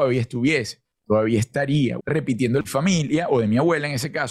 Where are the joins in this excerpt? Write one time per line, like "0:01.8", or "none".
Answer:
0:02.0
0:02.6